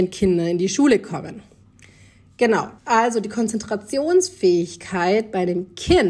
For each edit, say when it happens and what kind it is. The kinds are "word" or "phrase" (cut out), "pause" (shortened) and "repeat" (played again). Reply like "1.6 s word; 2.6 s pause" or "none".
2.8 s pause